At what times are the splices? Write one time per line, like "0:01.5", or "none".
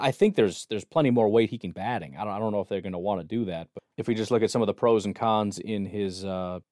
0:01.7
0:04.0